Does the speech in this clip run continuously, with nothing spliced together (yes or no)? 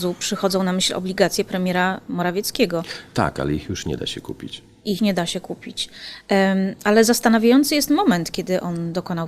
no